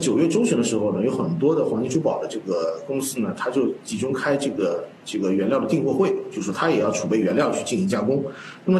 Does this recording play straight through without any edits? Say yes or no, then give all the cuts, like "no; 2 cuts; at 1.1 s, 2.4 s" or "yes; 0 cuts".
yes; 0 cuts